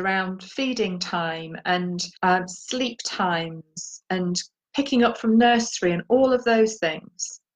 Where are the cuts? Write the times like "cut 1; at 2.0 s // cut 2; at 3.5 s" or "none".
cut 1; at 2.2 s